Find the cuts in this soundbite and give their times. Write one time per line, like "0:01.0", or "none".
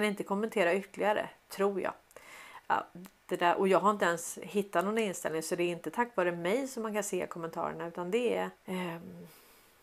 0:08.6